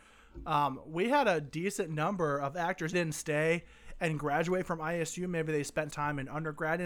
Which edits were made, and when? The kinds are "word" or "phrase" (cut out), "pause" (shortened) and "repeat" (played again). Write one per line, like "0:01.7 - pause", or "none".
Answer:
0:02.9 - phrase
0:05.9 - word

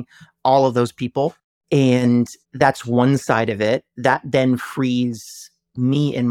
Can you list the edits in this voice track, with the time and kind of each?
0:02.4 - pause

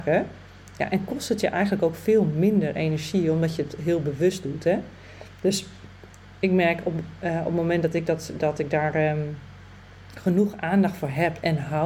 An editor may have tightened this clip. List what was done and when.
none

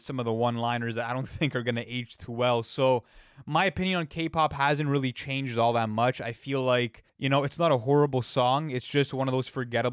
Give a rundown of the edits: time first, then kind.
0:07.1 - pause

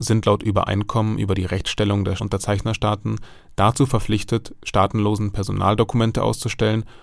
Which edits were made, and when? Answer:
0:02.2 - word

